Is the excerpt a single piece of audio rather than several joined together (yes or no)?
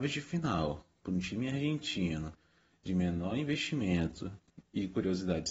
yes